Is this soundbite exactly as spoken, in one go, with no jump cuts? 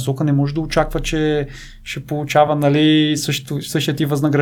yes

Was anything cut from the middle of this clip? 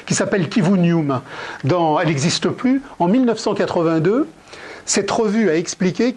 no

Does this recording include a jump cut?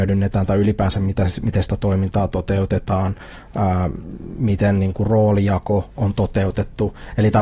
no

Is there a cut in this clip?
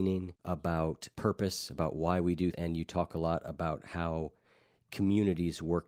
yes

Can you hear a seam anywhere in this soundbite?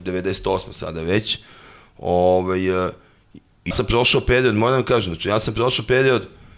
yes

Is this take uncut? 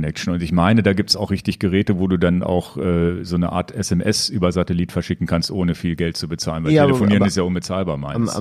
yes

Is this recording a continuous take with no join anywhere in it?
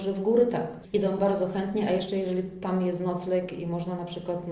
yes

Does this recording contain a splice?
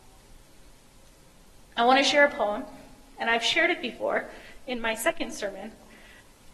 no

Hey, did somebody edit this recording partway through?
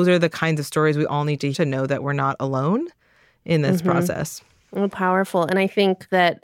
yes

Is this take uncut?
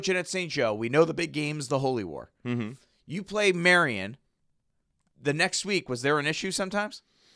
yes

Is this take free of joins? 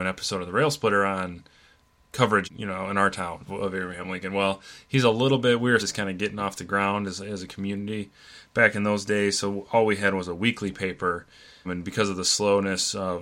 no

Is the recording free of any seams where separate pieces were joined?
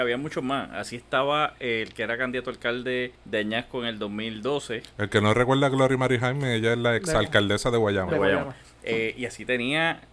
no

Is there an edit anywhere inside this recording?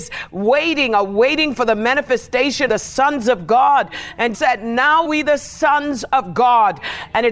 yes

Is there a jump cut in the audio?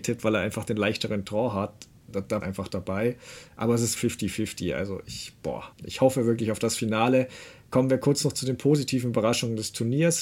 yes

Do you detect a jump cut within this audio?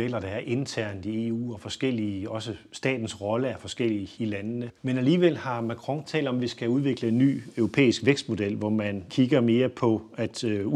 yes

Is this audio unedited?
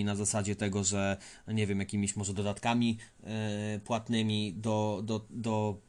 yes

